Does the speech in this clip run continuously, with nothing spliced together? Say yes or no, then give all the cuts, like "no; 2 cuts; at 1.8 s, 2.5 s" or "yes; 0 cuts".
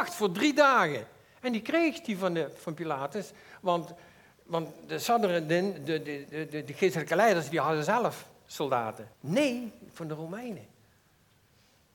no; 1 cut; at 9.1 s